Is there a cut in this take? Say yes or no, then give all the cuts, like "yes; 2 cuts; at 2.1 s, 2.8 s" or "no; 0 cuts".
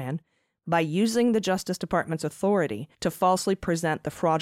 yes; 1 cut; at 2.9 s